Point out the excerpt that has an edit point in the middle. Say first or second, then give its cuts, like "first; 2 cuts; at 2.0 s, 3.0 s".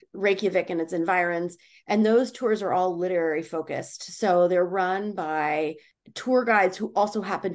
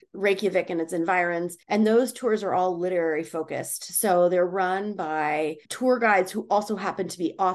second; 2 cuts; at 1.6 s, 5.6 s